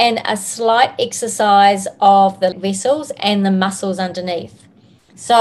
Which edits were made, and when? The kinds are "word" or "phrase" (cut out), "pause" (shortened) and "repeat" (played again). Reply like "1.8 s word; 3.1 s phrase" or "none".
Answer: 2.5 s word